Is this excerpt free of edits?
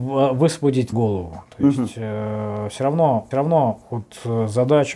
no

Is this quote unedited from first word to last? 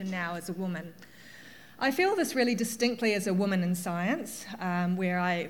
yes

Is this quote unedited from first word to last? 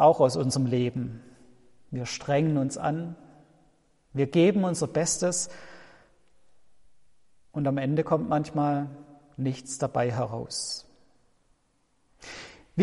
yes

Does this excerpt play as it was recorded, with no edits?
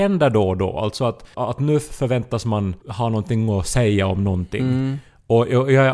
no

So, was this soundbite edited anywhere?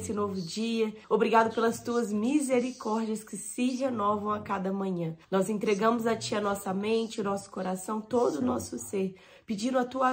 yes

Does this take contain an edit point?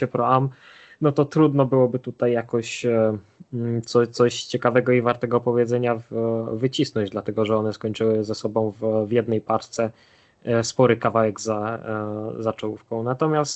no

